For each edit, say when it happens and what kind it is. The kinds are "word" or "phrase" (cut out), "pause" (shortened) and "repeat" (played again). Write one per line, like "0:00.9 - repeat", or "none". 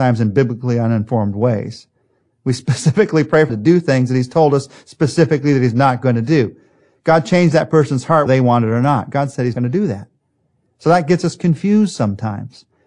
0:03.5 - word
0:08.3 - word
0:09.5 - word